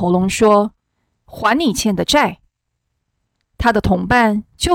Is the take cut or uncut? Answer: uncut